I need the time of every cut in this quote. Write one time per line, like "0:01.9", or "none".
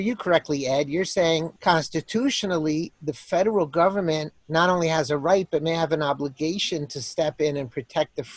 0:01.6
0:04.4